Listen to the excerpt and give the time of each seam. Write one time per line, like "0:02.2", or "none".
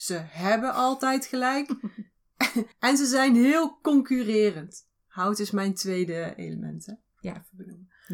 0:02.7